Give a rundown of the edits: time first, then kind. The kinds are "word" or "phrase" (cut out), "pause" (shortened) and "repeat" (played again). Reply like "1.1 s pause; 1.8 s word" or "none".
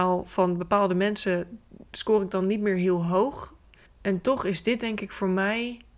1.9 s pause; 3.9 s pause

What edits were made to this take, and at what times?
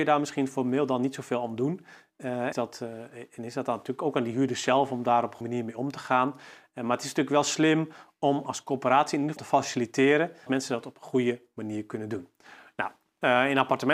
2.5 s phrase; 5.4 s word; 9.4 s word; 10.5 s word

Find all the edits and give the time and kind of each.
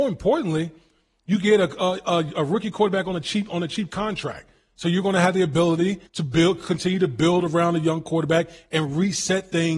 6.1 s pause

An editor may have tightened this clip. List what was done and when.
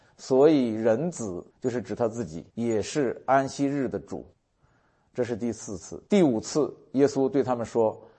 1.5 s pause; 2.5 s pause; 4.3 s pause; 6.1 s pause

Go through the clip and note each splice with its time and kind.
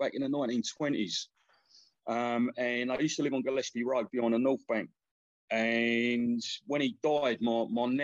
4.1 s word

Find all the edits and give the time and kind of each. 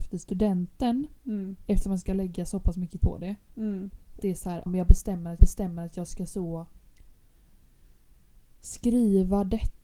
2.0 s word; 3.0 s word; 4.2 s word; 4.7 s word; 5.4 s repeat

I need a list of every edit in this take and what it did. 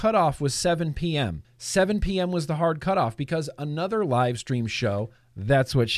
1.4 s pause

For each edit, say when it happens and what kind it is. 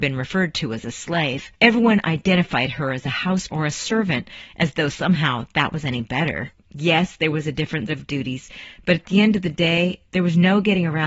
3.5 s word; 7.9 s word

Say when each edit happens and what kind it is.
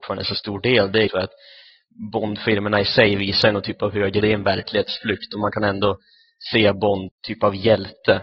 1.1 s word; 4.2 s word; 7.1 s phrase

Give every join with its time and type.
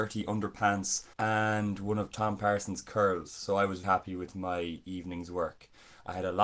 1.1 s pause; 3.8 s word

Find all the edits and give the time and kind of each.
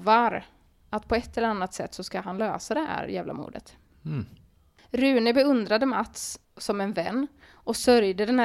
none

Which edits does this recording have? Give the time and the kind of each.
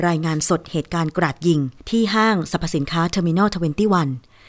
1.8 s pause

